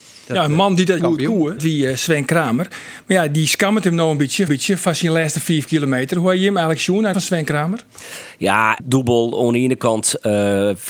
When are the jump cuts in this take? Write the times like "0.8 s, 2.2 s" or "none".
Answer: 1.0 s, 1.6 s, 4.5 s, 7.1 s, 8.8 s